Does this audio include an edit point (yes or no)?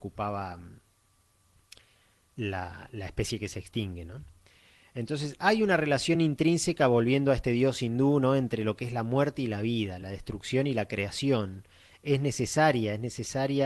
no